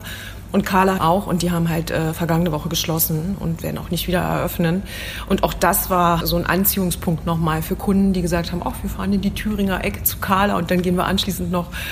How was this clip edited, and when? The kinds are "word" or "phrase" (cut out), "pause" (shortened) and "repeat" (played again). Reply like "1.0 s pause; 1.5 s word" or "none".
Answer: 1.0 s word; 6.2 s word

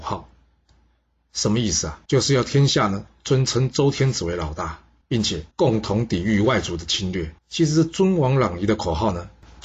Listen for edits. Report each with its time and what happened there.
2.0 s pause; 5.0 s pause; 5.5 s pause; 7.4 s pause

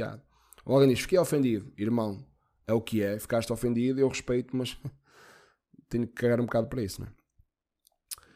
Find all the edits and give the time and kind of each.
none

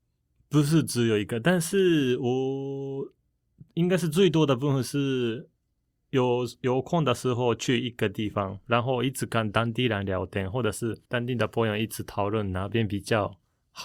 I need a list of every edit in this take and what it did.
11.1 s pause

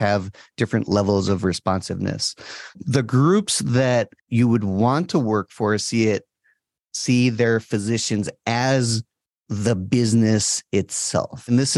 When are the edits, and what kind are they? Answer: 4.2 s pause

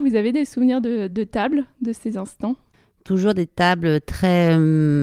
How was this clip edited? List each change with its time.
none

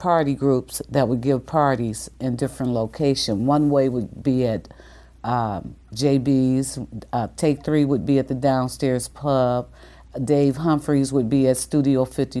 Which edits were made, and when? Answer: none

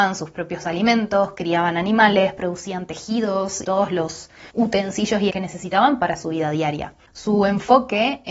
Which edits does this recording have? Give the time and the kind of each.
3.6 s word; 4.5 s pause; 5.3 s word

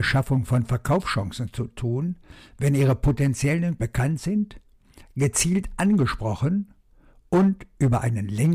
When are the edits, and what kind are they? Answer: 3.8 s word

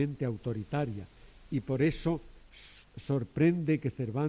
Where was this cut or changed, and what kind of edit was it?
none

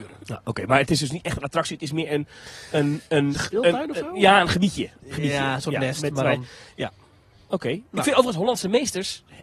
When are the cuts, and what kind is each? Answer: none

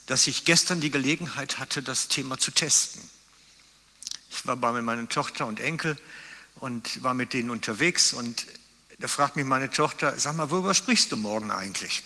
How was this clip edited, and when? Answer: none

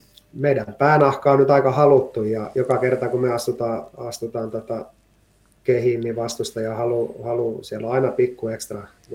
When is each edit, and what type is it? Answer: none

